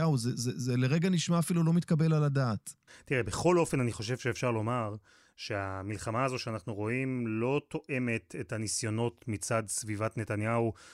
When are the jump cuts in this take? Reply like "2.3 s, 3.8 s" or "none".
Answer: 2.9 s